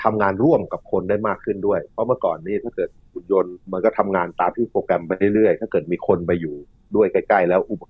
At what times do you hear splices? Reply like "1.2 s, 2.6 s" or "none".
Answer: 3.6 s